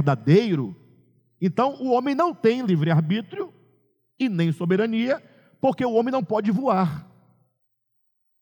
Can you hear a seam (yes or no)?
no